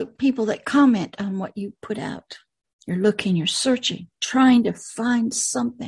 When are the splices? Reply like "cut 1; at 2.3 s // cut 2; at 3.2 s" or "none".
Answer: cut 1; at 2.6 s // cut 2; at 4.1 s